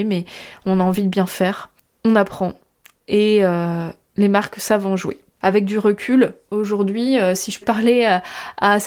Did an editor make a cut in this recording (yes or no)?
yes